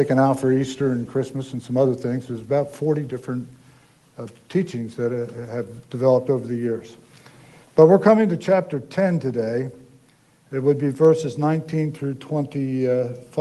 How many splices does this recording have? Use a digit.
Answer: 0